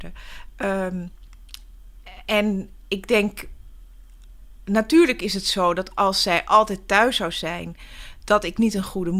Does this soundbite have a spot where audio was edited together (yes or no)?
no